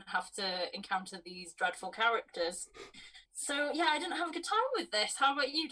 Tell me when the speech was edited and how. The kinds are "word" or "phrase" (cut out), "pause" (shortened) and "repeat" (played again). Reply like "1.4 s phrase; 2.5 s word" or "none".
3.2 s pause

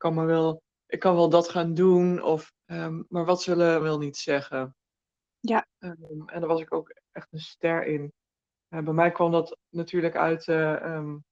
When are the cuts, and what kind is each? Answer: 2.6 s pause; 3.8 s phrase; 9.7 s pause

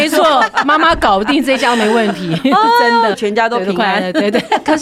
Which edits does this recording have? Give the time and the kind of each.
3.1 s phrase

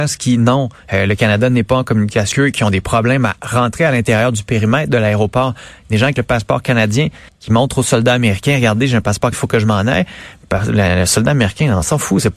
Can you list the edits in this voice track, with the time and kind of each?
2.3 s word; 7.3 s pause; 9.3 s word

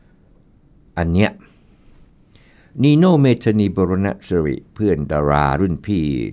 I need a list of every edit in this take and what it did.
none

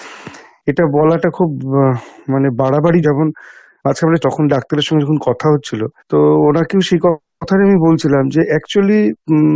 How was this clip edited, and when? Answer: 3.0 s phrase; 4.2 s phrase; 6.0 s pause

